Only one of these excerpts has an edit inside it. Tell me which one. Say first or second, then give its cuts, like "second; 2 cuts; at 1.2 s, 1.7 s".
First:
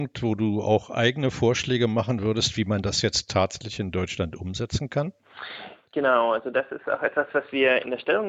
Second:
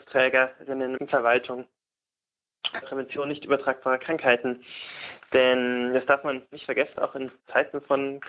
second; 4 cuts; at 1.0 s, 2.8 s, 6.9 s, 7.4 s